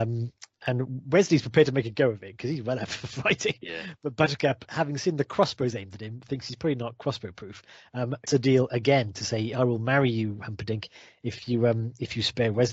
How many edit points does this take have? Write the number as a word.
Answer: one